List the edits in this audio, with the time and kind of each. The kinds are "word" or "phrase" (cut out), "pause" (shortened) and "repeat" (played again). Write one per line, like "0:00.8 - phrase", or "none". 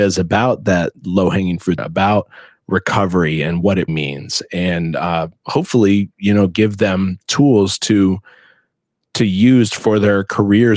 0:01.8 - phrase
0:03.9 - word